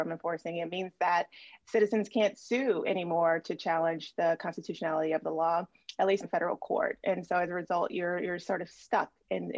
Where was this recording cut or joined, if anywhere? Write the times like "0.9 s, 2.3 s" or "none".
6.2 s